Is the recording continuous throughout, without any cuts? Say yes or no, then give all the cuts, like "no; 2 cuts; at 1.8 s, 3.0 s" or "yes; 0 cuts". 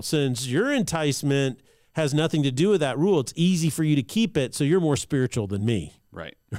yes; 0 cuts